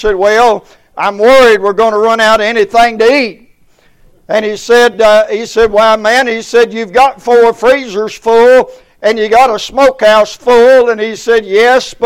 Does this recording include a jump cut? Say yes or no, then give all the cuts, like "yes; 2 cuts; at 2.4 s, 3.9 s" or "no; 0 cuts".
no; 0 cuts